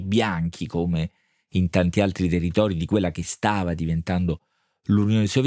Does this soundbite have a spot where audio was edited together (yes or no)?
no